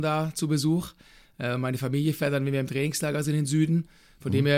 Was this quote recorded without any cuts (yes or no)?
yes